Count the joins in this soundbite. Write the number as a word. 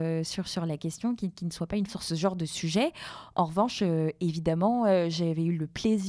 one